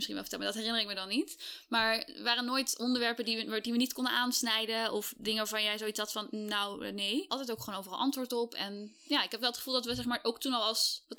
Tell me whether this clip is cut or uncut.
cut